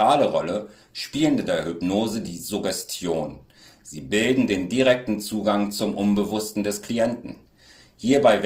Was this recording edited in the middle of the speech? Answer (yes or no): no